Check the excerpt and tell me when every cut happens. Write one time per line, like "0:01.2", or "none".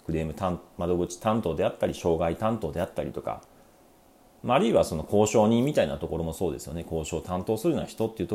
none